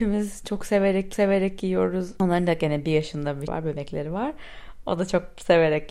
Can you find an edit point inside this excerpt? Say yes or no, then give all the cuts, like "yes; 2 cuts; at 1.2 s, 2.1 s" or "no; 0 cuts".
yes; 2 cuts; at 1.1 s, 3.5 s